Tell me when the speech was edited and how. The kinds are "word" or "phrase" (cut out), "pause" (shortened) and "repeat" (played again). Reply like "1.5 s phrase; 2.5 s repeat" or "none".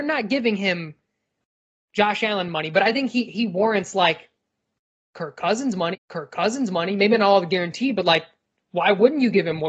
5.9 s repeat